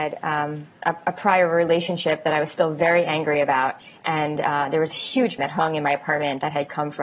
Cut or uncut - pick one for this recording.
cut